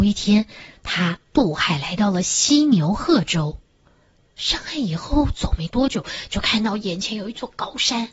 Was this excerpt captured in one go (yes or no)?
yes